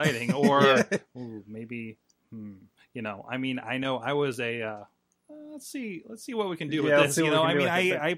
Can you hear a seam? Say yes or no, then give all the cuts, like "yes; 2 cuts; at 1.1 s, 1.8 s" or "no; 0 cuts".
no; 0 cuts